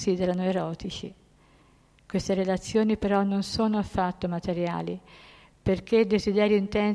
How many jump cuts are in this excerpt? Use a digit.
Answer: 0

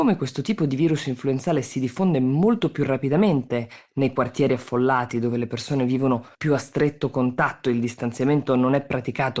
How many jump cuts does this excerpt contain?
1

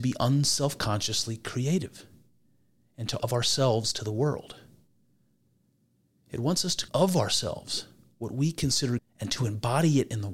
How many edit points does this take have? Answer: 3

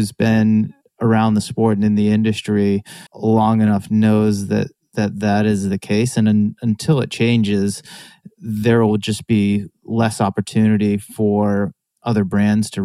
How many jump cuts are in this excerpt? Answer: 1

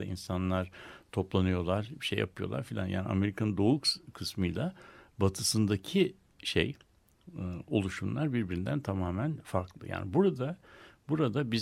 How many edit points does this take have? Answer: 0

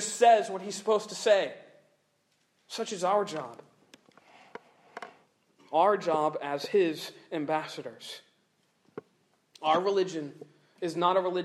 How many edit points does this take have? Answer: 0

